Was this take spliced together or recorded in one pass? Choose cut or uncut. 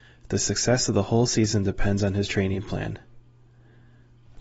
uncut